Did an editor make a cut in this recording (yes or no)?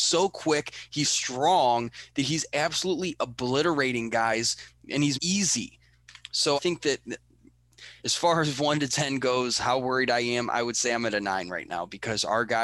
yes